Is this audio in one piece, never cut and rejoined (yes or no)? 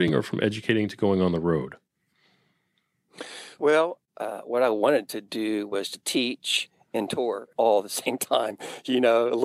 yes